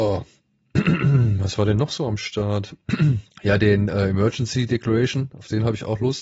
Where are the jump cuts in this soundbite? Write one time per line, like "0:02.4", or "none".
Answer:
0:03.3

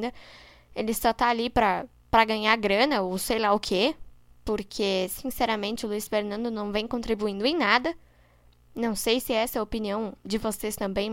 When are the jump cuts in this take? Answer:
none

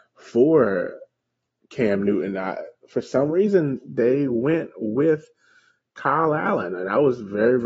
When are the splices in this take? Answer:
none

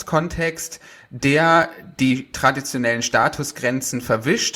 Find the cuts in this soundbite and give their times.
none

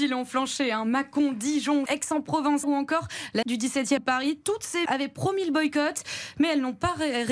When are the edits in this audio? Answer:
0:01.9
0:02.6
0:03.4
0:04.0
0:04.9

